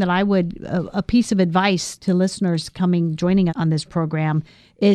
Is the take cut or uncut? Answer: cut